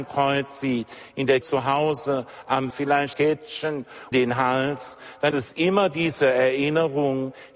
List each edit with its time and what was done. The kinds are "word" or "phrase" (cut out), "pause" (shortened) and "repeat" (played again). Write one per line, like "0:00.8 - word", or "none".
0:01.4 - word
0:02.7 - word
0:03.1 - word
0:04.1 - word
0:05.3 - word